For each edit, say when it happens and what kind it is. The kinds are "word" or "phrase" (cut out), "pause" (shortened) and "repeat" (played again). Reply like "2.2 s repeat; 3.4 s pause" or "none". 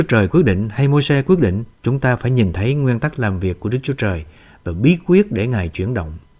1.7 s pause